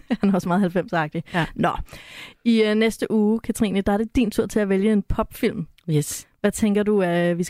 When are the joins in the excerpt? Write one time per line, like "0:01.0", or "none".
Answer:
none